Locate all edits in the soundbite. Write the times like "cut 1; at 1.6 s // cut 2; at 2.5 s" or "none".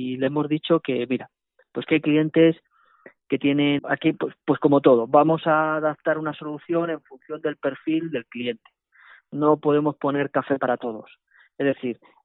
cut 1; at 3.8 s